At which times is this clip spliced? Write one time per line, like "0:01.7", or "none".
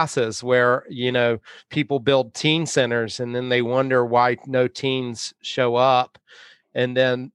none